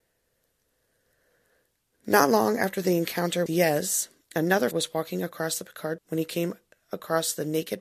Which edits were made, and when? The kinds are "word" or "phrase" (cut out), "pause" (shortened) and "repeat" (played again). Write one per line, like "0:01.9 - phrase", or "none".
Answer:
0:03.5 - word
0:04.7 - word
0:06.0 - word